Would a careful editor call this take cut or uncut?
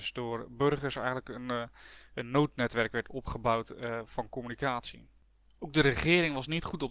uncut